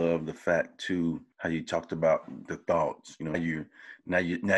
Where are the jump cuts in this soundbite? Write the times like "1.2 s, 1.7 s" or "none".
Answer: 1.3 s, 2.5 s, 3.3 s